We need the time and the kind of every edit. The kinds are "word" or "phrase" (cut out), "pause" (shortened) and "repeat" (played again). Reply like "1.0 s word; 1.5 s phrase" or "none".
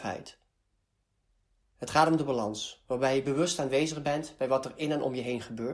none